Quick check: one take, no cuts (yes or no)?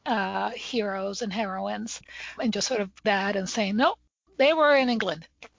no